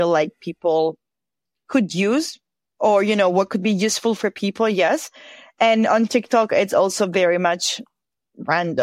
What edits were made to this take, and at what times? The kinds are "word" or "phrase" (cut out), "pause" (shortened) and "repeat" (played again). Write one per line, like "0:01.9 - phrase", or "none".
none